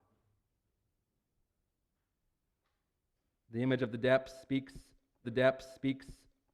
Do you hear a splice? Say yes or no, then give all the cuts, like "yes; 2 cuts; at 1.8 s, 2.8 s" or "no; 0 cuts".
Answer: yes; 1 cut; at 5.2 s